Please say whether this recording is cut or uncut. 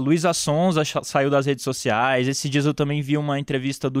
uncut